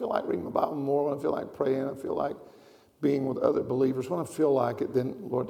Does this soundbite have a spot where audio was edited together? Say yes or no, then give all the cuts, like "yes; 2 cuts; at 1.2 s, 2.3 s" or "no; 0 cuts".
no; 0 cuts